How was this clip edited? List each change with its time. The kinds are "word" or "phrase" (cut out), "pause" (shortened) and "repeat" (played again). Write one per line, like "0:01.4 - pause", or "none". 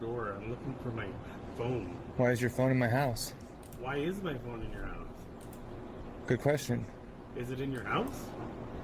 none